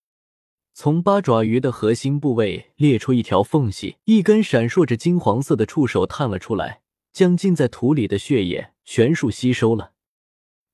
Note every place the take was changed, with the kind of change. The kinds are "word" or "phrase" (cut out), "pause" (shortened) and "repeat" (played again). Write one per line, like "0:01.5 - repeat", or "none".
0:04.0 - pause
0:06.9 - pause
0:08.8 - pause